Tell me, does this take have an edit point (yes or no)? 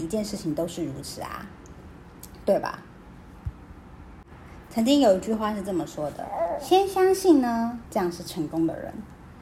yes